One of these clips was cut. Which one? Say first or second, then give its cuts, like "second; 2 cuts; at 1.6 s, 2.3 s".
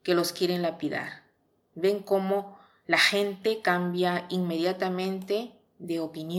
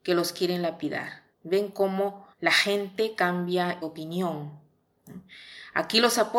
second; 3 cuts; at 1.3 s, 2.3 s, 3.8 s